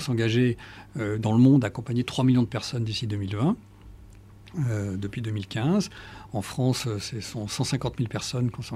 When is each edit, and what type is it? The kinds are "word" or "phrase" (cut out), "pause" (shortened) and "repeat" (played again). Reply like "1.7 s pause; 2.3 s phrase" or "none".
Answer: none